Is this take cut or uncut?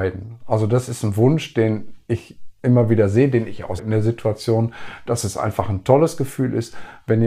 cut